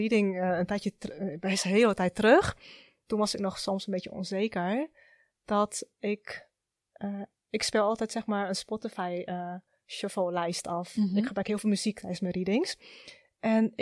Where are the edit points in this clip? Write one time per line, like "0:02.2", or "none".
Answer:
none